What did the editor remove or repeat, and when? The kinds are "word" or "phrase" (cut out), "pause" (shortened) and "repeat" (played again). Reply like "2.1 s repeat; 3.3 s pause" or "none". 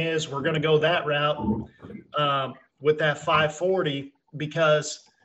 none